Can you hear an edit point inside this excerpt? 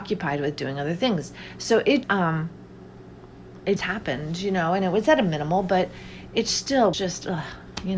yes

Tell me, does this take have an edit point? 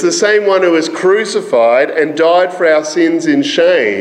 no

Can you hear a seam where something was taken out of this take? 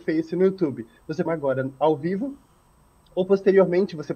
yes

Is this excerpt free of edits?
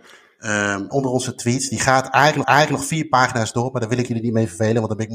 no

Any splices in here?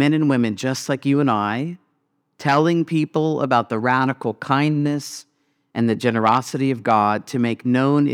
no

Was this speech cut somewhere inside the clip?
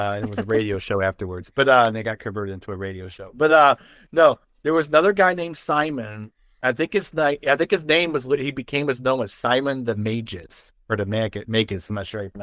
no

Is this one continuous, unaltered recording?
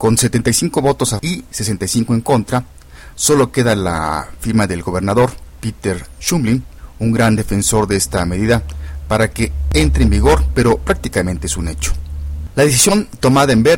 no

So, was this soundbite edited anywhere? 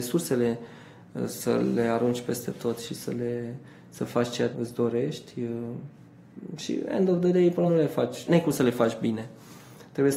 yes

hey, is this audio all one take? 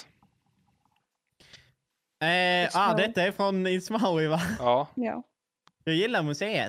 yes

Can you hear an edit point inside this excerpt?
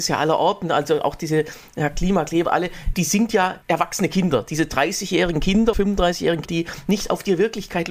yes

